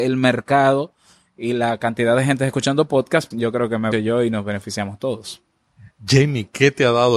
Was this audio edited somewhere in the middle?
yes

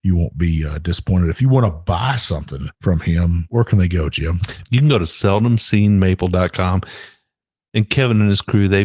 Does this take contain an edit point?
yes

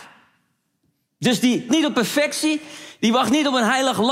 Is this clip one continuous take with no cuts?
no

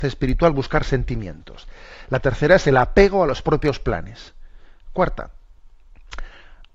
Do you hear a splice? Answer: no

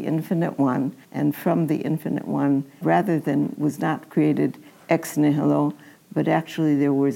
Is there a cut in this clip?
yes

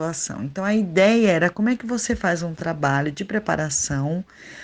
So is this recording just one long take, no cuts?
yes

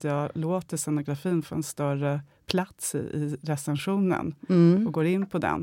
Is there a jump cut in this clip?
no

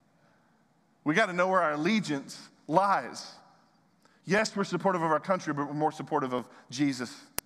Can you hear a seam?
no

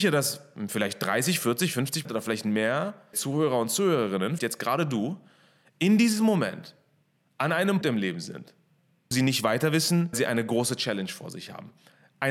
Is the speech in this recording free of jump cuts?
no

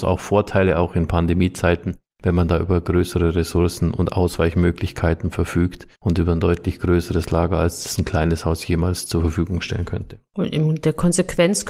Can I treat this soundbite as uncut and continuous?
no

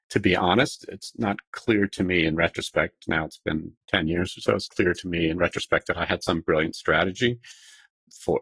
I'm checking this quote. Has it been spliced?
yes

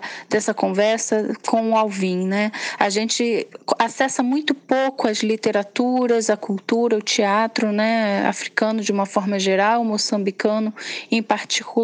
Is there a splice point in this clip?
no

